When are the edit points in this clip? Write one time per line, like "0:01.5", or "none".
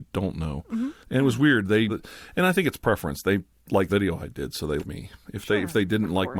0:01.0
0:01.9
0:03.9
0:04.8